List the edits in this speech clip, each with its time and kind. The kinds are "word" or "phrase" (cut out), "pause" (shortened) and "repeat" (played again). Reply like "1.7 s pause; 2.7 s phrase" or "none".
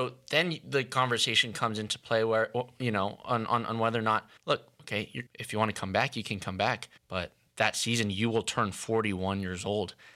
4.4 s pause; 5.3 s pause; 7.0 s pause